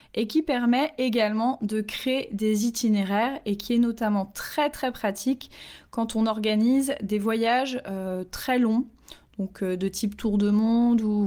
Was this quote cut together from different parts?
no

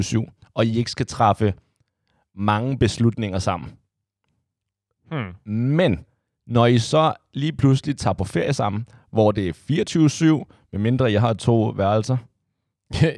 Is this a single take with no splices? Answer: yes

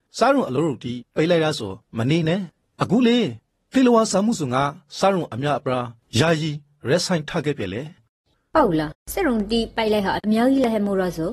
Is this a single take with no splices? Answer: yes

